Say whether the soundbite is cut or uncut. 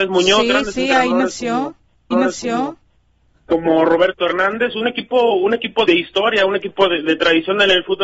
cut